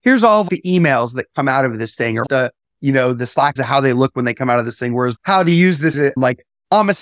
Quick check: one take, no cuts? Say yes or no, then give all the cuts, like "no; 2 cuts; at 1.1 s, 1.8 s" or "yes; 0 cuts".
no; 4 cuts; at 2.2 s, 3.6 s, 5.2 s, 5.9 s